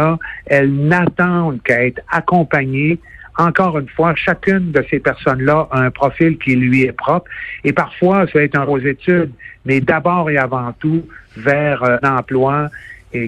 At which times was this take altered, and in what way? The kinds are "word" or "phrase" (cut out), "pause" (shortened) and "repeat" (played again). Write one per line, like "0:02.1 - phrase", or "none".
0:08.3 - word
0:08.7 - word
0:12.0 - word